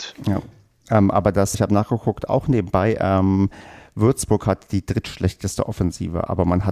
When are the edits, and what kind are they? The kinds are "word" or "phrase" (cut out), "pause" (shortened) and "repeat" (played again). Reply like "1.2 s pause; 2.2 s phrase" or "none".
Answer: 1.5 s word